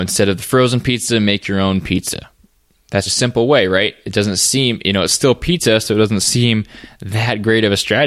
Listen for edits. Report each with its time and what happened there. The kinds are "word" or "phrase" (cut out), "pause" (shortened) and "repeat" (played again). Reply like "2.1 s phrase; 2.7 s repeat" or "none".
3.1 s word